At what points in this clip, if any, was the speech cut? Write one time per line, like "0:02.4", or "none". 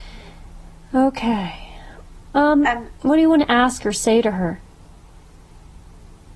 none